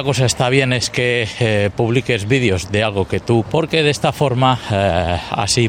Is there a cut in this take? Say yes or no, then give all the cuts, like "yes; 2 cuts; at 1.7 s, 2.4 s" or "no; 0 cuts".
yes; 1 cut; at 3.5 s